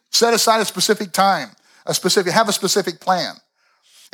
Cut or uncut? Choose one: uncut